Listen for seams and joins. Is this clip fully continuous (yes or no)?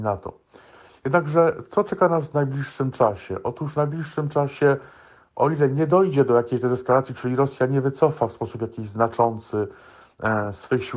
yes